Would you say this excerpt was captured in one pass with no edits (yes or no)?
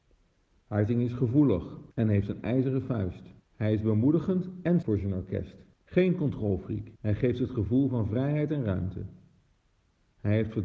no